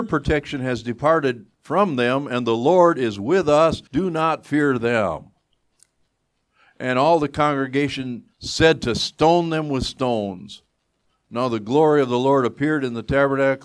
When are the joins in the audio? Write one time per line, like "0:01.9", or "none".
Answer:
0:03.9
0:08.3

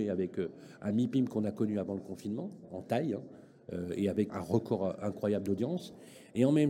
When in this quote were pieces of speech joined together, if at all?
0:04.3

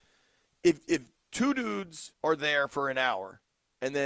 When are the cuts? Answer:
0:01.2
0:02.2

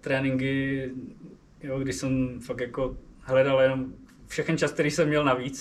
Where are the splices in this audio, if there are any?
none

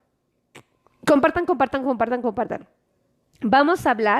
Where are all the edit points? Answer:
none

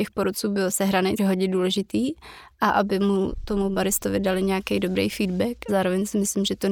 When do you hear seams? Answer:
0:01.2
0:05.7

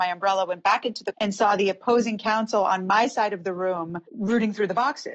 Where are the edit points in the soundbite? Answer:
0:01.1
0:04.1

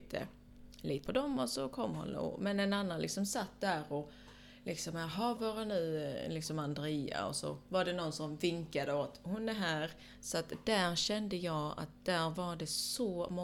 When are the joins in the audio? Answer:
0:01.1
0:05.4

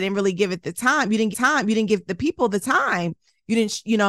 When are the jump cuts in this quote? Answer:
0:01.3

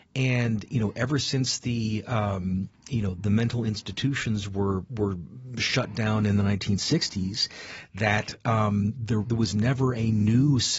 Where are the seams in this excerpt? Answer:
0:03.2
0:09.2

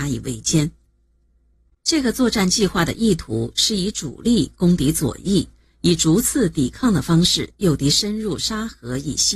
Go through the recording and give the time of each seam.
none

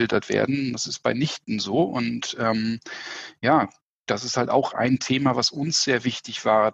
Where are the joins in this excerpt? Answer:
none

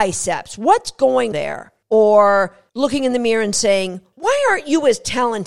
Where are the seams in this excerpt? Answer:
0:01.3

